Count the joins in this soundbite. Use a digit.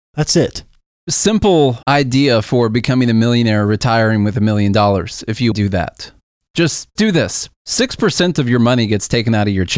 4